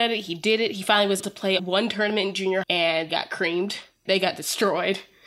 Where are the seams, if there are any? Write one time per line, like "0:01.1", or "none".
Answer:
0:01.2
0:01.6
0:02.6
0:03.1
0:04.1